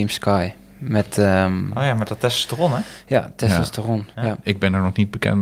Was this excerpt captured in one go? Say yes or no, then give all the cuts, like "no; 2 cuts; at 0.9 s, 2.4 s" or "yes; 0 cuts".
no; 1 cut; at 4.1 s